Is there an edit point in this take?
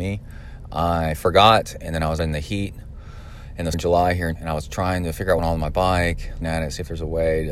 yes; 5 cuts; at 2.2 s, 3.7 s, 4.4 s, 5.4 s, 6.4 s

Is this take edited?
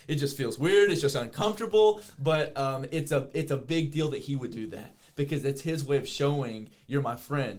no; 0 cuts

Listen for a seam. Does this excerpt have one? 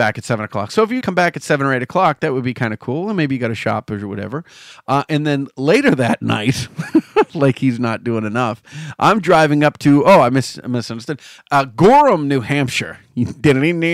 yes; 1 cut; at 1.0 s

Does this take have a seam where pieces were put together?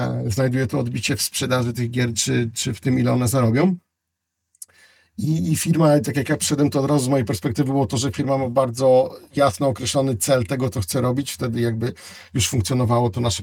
no; 0 cuts

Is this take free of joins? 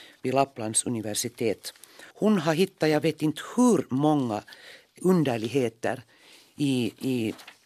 no; 2 cuts; at 2.1 s, 5.0 s

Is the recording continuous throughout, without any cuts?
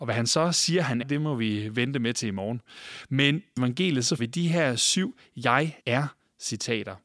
no; 4 cuts; at 1.0 s, 3.6 s, 4.2 s, 5.8 s

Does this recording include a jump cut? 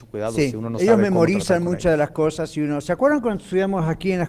no; 0 cuts

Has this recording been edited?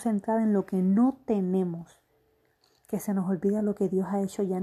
no; 0 cuts

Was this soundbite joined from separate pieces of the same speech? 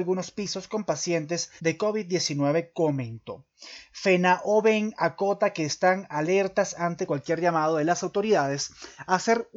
yes; 1 cut; at 1.6 s

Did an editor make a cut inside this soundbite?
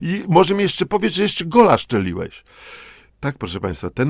no; 0 cuts

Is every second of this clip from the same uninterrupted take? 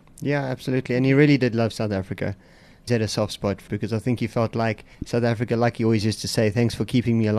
no; 3 cuts; at 2.9 s, 3.7 s, 4.9 s

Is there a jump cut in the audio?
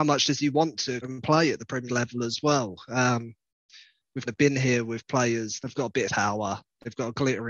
yes; 5 cuts; at 1.0 s, 1.9 s, 4.3 s, 5.6 s, 6.1 s

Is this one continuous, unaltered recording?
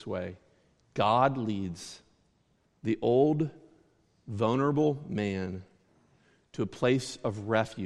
yes; 0 cuts

